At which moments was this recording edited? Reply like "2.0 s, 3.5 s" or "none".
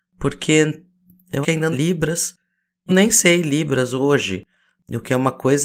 1.4 s, 1.7 s, 2.9 s